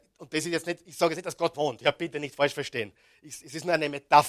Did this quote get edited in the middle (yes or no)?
yes